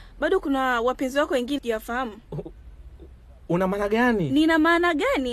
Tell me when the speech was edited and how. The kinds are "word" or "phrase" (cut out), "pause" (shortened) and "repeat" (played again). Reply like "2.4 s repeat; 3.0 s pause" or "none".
1.6 s word